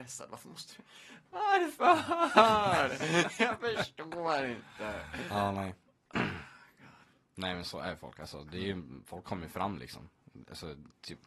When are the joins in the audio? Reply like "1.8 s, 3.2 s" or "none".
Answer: none